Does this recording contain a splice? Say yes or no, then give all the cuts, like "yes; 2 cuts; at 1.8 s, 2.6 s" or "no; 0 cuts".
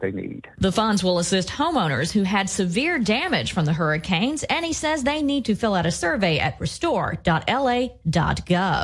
no; 0 cuts